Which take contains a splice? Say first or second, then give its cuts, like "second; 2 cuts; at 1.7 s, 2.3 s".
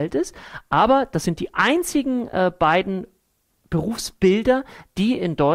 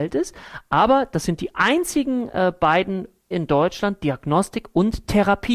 second; 1 cut; at 3.3 s